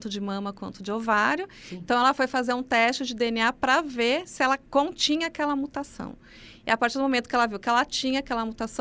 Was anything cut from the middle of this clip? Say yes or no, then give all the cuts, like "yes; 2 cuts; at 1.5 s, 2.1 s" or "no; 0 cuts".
yes; 1 cut; at 4.7 s